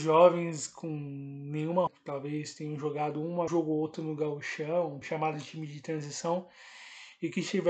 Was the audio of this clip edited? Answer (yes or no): yes